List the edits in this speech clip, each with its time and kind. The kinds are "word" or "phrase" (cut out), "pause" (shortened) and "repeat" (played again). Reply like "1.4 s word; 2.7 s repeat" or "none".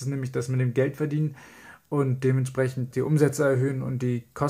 2.9 s word